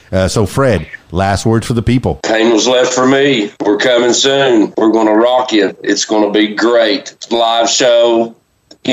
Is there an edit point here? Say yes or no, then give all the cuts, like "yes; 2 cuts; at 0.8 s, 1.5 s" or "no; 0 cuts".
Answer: no; 0 cuts